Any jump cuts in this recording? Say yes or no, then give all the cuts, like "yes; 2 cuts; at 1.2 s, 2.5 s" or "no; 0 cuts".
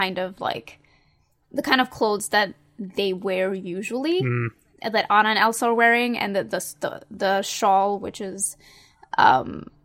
no; 0 cuts